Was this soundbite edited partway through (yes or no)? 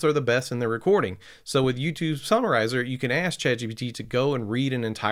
no